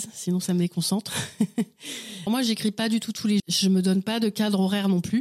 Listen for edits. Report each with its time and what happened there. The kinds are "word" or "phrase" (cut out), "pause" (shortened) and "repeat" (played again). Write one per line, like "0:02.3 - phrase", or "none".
0:02.3 - word
0:03.4 - word